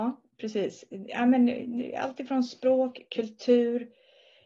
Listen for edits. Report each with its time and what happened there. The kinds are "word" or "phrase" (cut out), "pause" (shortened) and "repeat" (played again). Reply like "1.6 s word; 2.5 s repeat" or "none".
none